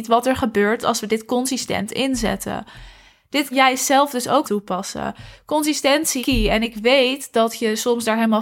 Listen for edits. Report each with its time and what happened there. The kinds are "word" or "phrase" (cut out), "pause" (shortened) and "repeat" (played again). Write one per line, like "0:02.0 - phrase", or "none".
0:03.5 - word
0:04.4 - word
0:06.2 - word